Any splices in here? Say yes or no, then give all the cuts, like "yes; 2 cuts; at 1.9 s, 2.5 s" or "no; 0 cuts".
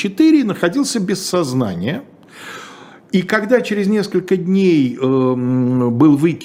no; 0 cuts